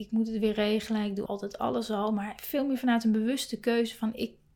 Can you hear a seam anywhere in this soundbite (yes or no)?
yes